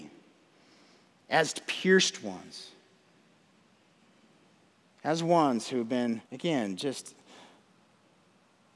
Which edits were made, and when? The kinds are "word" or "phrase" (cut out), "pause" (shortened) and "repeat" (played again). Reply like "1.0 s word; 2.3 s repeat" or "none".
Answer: 6.2 s pause